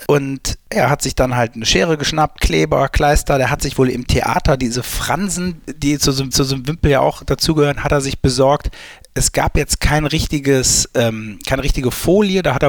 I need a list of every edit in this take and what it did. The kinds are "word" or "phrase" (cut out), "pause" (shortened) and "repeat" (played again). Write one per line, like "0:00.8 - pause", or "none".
0:06.3 - repeat